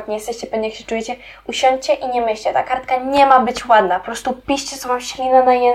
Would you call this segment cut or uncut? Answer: uncut